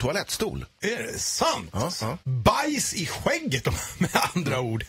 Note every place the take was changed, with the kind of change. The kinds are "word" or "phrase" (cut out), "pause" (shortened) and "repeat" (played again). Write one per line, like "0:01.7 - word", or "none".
0:02.2 - pause